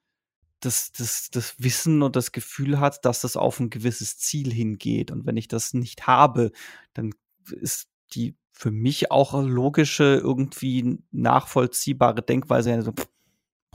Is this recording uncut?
yes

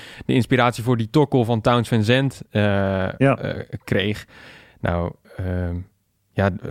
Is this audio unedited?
yes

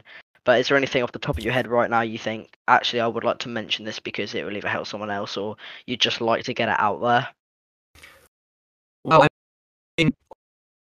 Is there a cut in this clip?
no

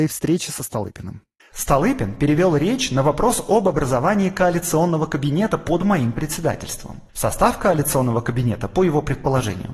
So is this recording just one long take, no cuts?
no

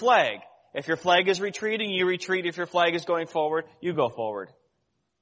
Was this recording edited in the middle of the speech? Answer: no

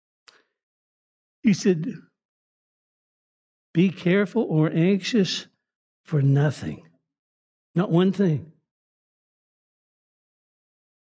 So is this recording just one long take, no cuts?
yes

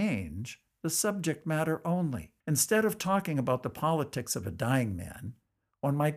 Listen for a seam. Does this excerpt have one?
yes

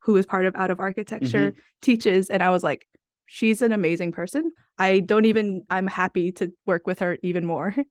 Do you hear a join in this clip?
no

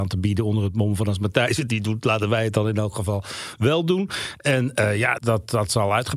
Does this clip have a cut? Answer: yes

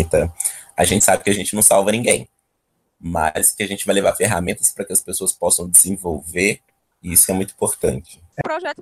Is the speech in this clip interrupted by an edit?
no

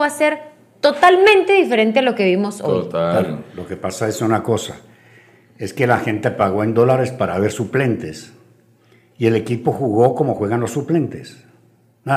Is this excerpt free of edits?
yes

